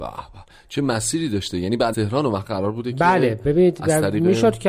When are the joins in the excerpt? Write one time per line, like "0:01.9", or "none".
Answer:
0:01.9